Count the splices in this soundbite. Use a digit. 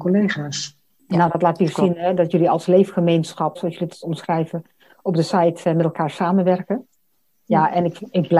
1